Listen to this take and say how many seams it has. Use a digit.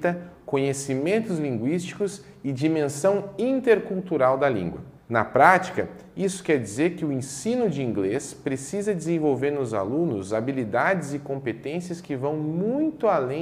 1